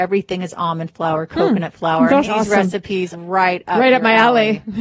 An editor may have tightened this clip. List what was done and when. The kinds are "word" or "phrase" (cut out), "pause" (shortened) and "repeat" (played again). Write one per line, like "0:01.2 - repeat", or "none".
0:02.2 - word
0:03.1 - word